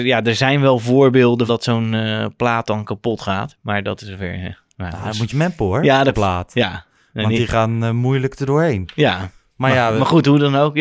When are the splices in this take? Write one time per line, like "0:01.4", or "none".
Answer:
0:01.5
0:05.3
0:06.1